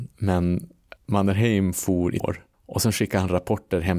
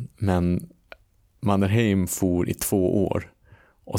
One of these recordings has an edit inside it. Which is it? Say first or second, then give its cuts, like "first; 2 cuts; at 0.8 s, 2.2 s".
first; 3 cuts; at 1.0 s, 2.2 s, 2.5 s